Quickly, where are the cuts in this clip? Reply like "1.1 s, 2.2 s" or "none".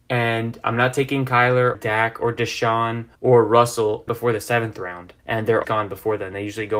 1.7 s, 3.1 s, 4.1 s, 5.2 s, 5.6 s